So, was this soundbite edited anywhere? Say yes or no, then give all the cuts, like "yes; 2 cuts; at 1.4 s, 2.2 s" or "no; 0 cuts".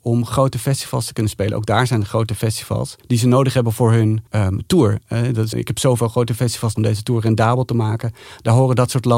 yes; 4 cuts; at 3.0 s, 4.3 s, 5.5 s, 6.8 s